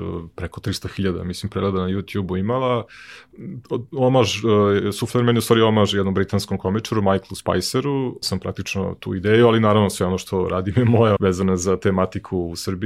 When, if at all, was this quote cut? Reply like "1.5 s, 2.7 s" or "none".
8.2 s, 11.2 s